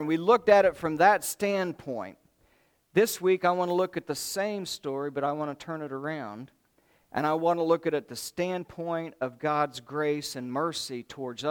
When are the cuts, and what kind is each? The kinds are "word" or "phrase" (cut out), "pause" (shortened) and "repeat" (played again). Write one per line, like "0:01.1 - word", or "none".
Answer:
none